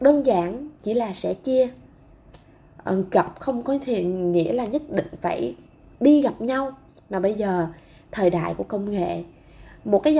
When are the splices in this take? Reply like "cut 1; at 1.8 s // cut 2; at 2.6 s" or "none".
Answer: none